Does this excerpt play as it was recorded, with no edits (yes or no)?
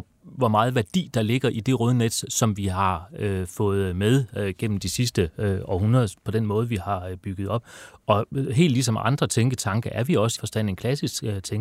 no